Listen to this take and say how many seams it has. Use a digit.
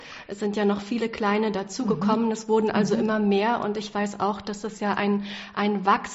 0